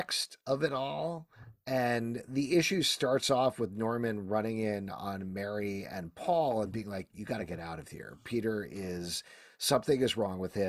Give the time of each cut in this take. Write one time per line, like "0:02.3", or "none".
none